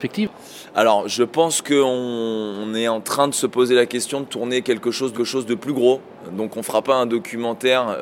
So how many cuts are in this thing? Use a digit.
1